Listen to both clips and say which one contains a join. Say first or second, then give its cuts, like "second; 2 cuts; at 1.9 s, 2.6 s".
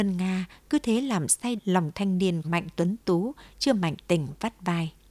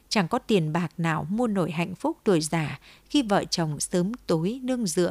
first; 3 cuts; at 1.6 s, 1.9 s, 2.4 s